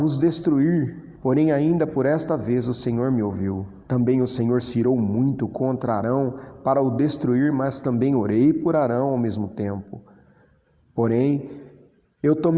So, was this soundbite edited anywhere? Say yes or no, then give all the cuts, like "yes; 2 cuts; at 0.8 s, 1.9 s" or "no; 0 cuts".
yes; 2 cuts; at 1.2 s, 3.8 s